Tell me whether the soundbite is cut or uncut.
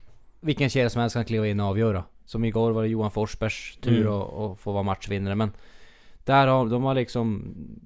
uncut